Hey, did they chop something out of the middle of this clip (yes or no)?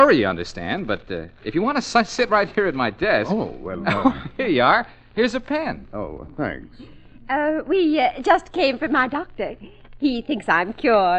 no